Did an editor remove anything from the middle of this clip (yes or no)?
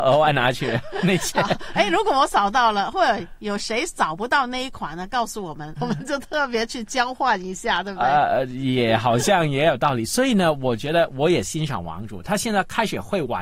yes